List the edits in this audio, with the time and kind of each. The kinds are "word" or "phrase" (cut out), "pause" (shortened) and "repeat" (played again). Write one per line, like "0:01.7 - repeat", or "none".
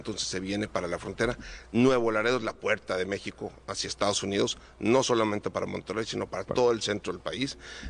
none